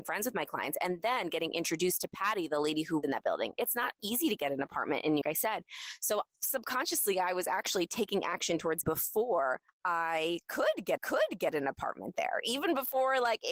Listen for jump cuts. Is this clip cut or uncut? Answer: cut